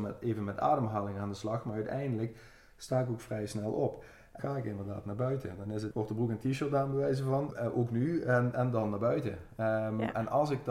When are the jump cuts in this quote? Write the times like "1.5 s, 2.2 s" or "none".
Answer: 4.4 s, 5.9 s, 7.5 s, 8.5 s